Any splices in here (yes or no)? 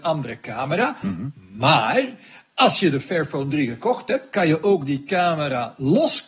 no